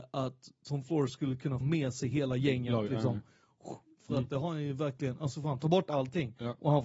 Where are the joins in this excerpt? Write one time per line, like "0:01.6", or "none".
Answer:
0:01.6